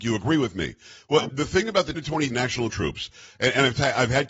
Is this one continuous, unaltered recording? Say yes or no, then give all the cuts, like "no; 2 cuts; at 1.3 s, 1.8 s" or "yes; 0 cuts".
no; 4 cuts; at 1.3 s, 1.9 s, 2.3 s, 2.7 s